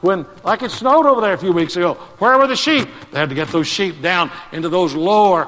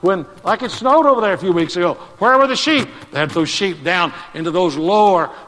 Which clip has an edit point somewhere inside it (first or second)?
second